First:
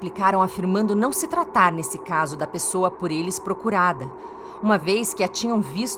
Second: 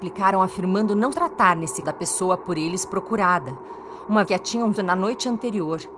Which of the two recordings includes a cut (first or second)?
second